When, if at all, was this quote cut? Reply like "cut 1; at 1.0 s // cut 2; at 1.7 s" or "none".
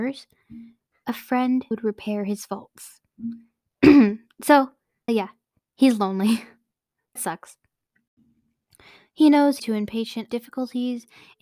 cut 1; at 1.7 s // cut 2; at 5.1 s // cut 3; at 7.2 s // cut 4; at 9.6 s // cut 5; at 10.3 s